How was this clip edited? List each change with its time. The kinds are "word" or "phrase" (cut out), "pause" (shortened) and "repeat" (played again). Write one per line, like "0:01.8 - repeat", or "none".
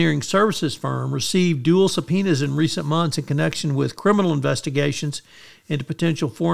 none